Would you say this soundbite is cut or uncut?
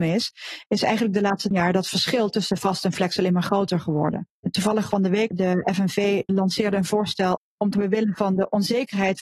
cut